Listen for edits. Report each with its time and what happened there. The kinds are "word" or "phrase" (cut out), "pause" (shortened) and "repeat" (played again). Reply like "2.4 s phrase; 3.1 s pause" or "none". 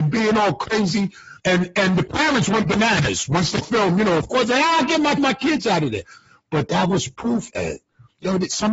1.4 s pause; 3.6 s phrase; 5.2 s phrase